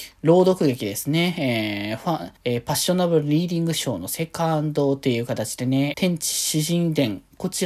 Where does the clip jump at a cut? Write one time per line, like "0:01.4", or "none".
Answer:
0:02.4
0:05.9